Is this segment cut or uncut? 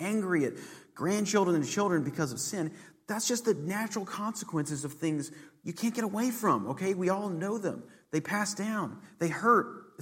uncut